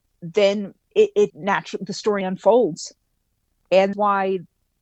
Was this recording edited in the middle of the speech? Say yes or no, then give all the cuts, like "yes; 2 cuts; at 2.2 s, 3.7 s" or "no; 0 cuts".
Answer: yes; 3 cuts; at 1.3 s, 2.2 s, 3.9 s